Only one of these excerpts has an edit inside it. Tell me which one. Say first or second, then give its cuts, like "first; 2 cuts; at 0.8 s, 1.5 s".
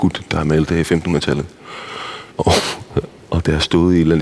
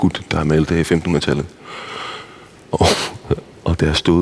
first; 1 cut; at 2.3 s